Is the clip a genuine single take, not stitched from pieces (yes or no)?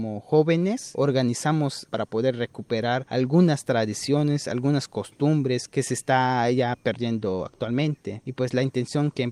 yes